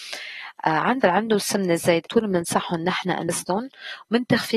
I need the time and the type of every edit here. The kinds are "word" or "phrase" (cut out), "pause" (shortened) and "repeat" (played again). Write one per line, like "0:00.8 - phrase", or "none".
0:01.0 - word
0:02.1 - word
0:03.3 - word